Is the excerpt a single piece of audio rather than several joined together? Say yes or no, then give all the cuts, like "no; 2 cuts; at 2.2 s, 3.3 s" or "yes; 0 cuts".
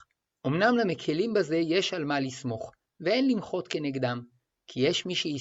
yes; 0 cuts